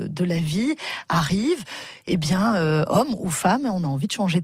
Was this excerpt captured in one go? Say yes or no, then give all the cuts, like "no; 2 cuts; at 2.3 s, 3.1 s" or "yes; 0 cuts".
yes; 0 cuts